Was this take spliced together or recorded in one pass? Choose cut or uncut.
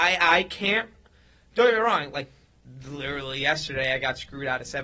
uncut